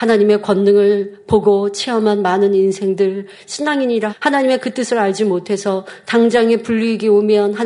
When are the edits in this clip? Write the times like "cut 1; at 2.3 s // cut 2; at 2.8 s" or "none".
cut 1; at 4.1 s